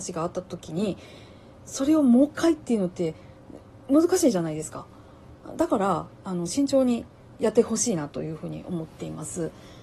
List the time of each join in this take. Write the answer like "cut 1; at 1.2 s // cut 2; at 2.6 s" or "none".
none